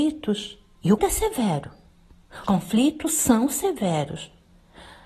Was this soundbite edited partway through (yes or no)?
yes